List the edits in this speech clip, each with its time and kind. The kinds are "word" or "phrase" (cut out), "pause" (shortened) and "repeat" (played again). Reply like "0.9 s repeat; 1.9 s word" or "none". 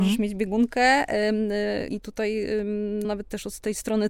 1.9 s word; 3.0 s word

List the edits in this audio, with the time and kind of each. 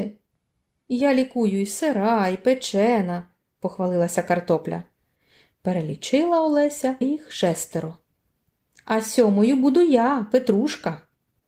7.0 s word

